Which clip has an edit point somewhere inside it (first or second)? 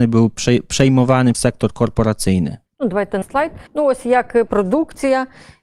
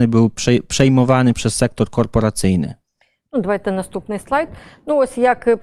first